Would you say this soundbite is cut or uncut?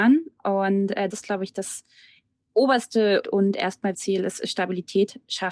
cut